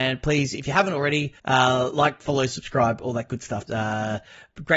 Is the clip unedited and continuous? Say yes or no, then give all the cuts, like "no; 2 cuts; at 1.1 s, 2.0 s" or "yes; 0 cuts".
no; 2 cuts; at 1.4 s, 3.7 s